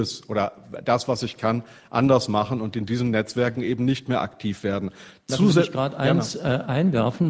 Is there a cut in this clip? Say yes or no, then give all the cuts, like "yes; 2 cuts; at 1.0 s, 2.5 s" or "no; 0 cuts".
no; 0 cuts